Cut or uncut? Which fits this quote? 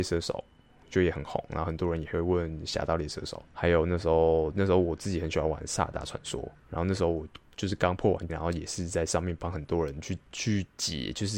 cut